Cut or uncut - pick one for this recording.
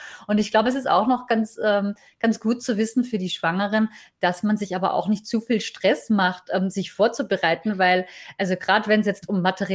uncut